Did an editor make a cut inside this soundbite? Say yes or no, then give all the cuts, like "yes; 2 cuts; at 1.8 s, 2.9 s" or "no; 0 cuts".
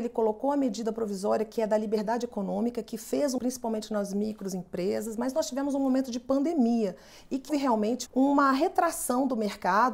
yes; 3 cuts; at 3.4 s, 7.5 s, 8.1 s